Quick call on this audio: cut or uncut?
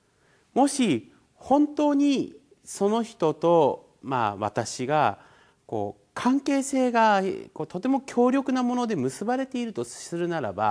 uncut